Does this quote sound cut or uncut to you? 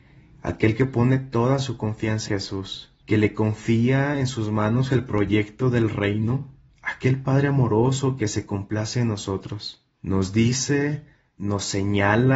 cut